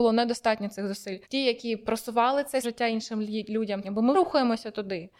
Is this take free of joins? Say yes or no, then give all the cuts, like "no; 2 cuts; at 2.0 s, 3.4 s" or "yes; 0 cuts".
no; 4 cuts; at 1.2 s, 2.6 s, 3.8 s, 4.1 s